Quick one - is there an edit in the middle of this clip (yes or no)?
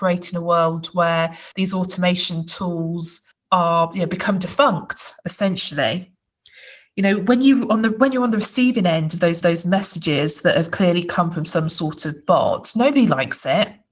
yes